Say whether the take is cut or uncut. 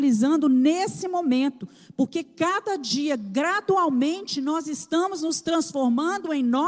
uncut